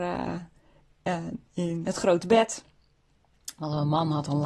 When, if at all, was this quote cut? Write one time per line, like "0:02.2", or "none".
none